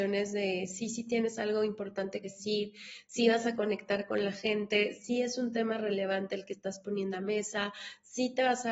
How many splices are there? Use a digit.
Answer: 2